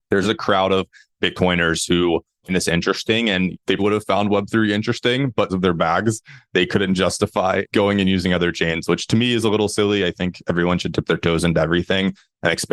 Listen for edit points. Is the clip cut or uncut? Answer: cut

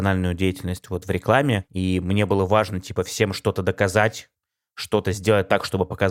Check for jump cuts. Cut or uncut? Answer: uncut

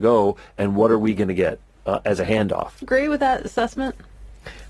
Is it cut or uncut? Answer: cut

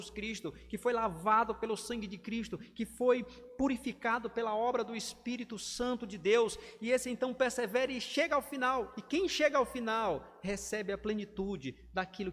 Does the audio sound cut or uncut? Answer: uncut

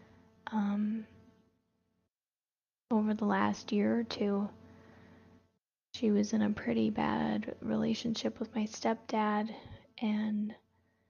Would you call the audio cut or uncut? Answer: uncut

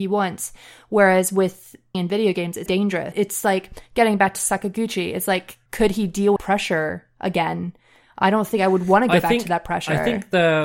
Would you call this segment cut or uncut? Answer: cut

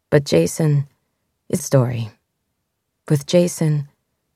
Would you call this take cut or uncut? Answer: cut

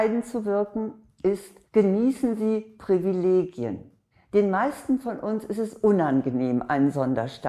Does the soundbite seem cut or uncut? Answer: cut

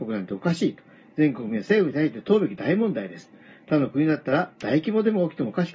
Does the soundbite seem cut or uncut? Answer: uncut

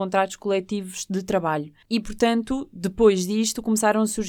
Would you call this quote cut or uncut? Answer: cut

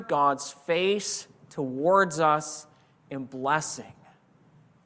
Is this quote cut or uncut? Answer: uncut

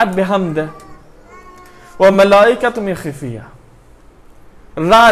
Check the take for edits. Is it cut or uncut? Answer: uncut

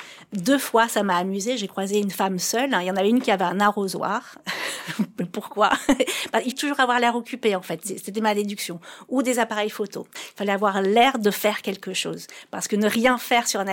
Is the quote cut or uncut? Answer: cut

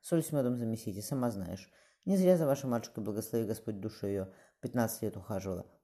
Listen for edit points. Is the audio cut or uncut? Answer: uncut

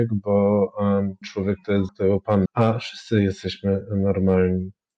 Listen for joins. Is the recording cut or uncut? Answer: cut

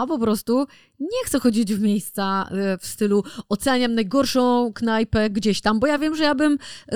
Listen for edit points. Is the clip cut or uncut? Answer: uncut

